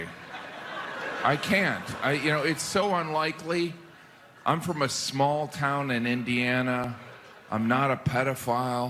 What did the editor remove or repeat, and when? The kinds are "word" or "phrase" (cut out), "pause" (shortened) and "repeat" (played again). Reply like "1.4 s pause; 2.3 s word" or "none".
none